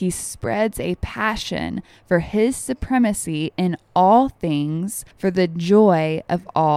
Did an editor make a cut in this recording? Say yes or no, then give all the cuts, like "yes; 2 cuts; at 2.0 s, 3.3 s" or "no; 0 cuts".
yes; 1 cut; at 5.1 s